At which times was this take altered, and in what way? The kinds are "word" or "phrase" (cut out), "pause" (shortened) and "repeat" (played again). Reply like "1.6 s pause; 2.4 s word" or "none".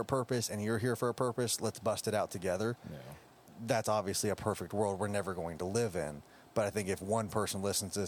none